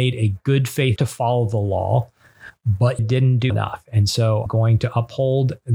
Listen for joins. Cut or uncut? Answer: cut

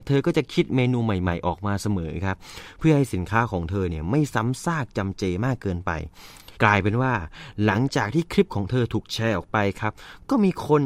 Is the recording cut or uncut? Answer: cut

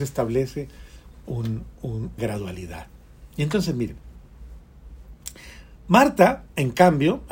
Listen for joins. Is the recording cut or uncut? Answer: cut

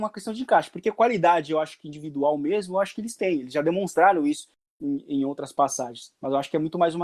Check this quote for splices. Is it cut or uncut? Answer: uncut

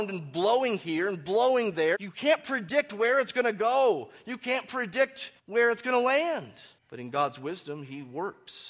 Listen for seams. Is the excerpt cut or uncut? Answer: cut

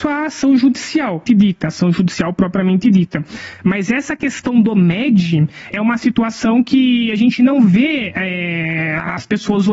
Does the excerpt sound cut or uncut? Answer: cut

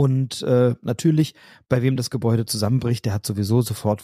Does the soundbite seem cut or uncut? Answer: uncut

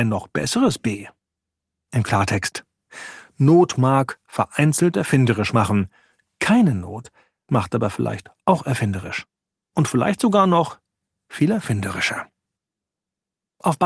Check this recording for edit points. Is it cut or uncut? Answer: uncut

